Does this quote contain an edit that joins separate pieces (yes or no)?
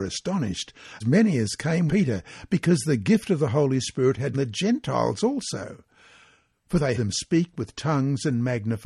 yes